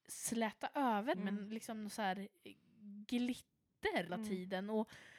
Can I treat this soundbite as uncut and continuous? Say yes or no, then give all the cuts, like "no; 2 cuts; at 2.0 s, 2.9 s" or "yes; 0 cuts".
no; 2 cuts; at 1.1 s, 4.1 s